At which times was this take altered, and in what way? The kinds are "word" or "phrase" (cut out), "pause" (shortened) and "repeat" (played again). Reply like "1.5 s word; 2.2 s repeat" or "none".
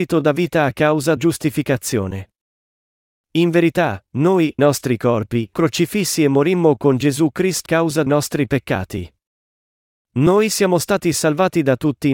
1.2 s word; 4.6 s word; 5.5 s word; 7.7 s word; 8.1 s word